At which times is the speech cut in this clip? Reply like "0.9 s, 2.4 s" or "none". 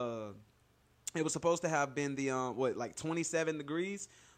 none